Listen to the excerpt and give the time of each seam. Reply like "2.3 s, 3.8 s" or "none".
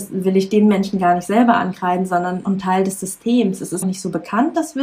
2.4 s, 3.8 s